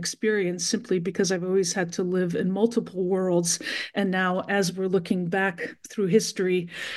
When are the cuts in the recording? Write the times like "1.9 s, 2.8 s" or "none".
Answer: none